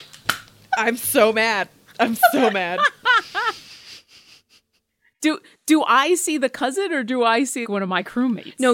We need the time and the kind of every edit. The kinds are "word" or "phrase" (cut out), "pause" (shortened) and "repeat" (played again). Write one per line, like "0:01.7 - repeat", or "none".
0:07.6 - word